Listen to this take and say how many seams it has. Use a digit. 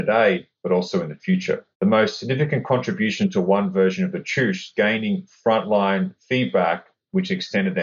2